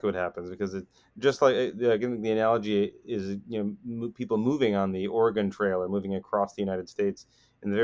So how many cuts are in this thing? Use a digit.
0